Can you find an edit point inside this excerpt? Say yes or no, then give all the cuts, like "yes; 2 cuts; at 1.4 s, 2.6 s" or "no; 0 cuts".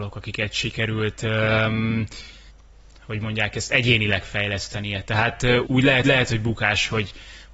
yes; 3 cuts; at 2.5 s, 5.6 s, 6.0 s